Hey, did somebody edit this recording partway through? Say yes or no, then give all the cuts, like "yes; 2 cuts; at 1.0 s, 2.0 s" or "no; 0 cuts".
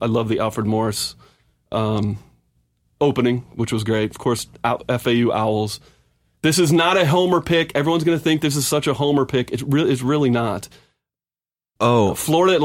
no; 0 cuts